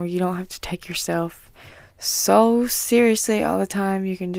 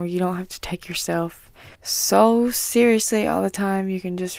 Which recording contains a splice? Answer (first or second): second